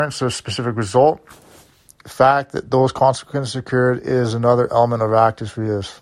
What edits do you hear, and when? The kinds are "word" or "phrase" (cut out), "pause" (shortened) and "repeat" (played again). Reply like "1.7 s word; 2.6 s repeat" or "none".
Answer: none